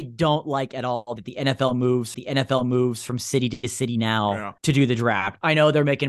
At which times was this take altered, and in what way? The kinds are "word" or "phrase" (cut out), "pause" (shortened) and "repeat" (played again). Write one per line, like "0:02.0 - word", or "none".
0:01.2 - phrase
0:02.1 - repeat
0:04.6 - pause